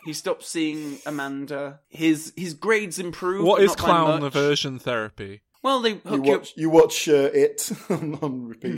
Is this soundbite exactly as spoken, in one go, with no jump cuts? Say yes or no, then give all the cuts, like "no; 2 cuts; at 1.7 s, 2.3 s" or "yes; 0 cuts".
yes; 0 cuts